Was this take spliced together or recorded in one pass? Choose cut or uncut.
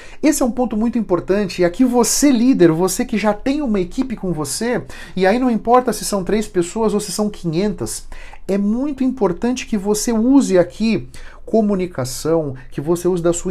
uncut